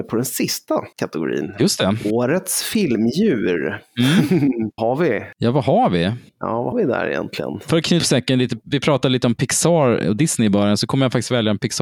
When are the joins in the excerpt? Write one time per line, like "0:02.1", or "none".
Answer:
0:00.9
0:04.8
0:06.3
0:06.7
0:08.0